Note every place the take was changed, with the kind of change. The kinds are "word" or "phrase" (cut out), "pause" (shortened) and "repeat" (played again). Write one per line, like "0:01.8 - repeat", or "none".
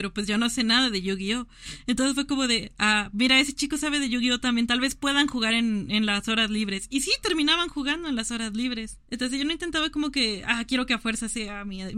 none